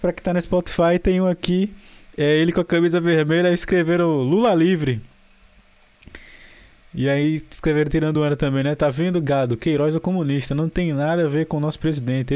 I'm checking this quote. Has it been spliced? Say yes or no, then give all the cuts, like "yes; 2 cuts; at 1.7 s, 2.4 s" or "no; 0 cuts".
no; 0 cuts